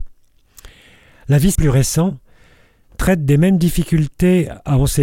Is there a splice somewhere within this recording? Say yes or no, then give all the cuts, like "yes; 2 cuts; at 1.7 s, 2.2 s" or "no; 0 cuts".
yes; 1 cut; at 1.5 s